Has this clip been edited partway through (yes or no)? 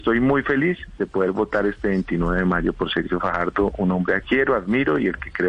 yes